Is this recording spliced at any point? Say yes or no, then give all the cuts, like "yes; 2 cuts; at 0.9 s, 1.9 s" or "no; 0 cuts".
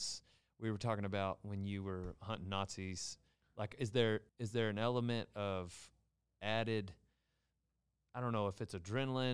yes; 1 cut; at 4.3 s